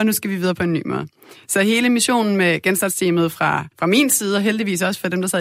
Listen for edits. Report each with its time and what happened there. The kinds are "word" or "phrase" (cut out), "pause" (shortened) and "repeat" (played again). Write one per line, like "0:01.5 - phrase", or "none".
0:03.7 - pause